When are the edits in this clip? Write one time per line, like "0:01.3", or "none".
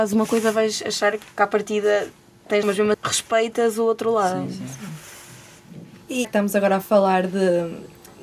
0:02.6
0:02.9
0:06.2

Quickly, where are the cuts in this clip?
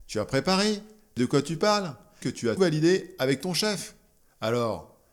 0:01.2
0:02.2
0:02.6

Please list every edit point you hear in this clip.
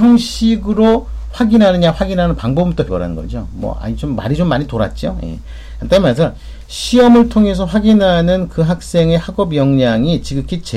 0:02.9

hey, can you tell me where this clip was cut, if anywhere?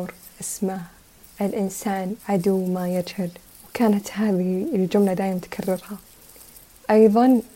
0:02.2
0:03.5

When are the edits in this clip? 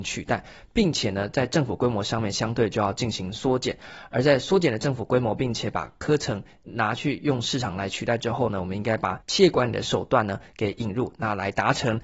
0:09.2

